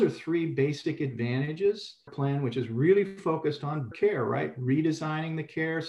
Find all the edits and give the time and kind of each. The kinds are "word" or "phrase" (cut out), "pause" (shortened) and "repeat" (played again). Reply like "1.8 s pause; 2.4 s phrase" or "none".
2.1 s phrase; 3.9 s word